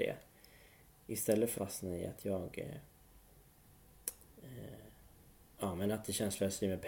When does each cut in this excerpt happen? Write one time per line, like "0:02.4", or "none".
0:01.6